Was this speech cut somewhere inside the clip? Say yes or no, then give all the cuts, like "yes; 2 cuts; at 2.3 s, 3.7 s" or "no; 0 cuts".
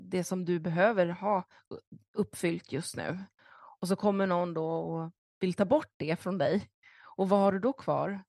no; 0 cuts